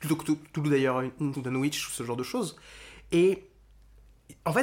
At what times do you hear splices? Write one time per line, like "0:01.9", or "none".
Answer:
0:01.3